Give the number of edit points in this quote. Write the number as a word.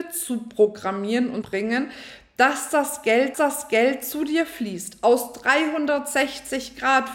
two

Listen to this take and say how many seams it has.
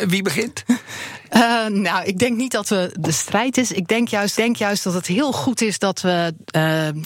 one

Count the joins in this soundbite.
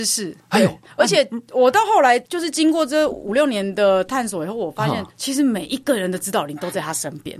two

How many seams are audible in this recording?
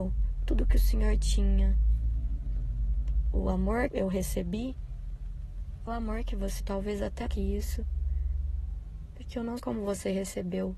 five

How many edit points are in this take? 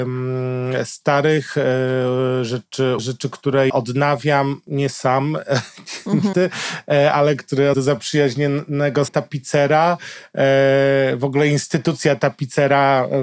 five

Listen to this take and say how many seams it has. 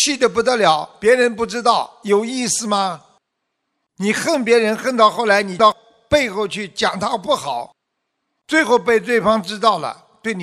zero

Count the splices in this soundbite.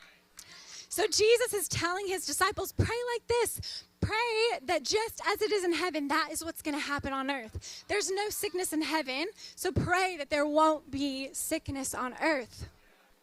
zero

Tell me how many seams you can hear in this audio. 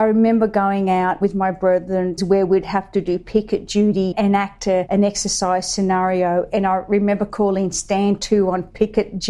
two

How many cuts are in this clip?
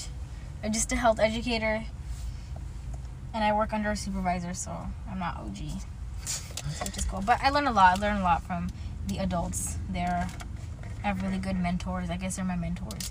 zero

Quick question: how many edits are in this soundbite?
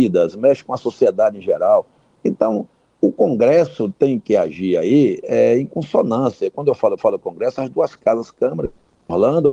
one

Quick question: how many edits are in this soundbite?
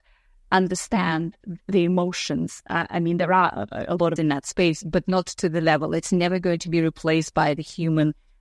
one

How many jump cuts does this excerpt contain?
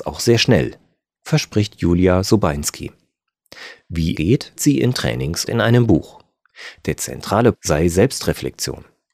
four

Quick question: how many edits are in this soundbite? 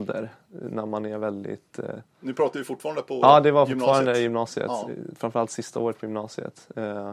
zero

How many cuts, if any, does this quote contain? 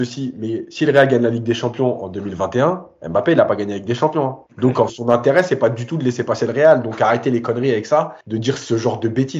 three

